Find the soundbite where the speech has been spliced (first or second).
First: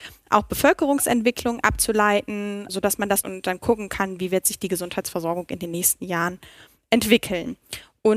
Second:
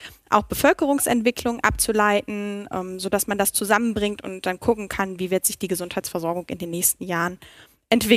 first